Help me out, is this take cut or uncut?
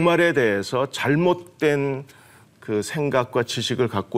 uncut